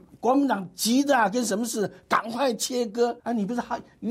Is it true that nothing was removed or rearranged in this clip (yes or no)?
no